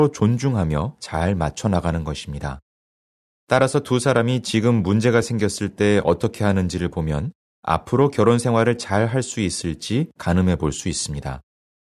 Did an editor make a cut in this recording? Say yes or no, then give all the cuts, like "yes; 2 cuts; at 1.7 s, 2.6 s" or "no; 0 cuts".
no; 0 cuts